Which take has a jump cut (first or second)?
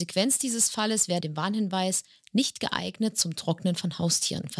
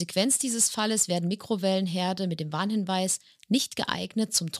first